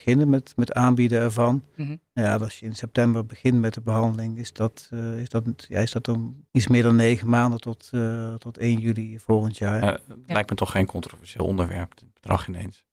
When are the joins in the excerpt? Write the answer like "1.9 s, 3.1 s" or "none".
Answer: 6.5 s